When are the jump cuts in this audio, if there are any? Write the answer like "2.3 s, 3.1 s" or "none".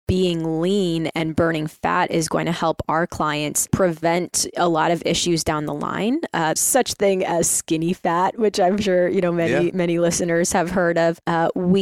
3.7 s, 6.6 s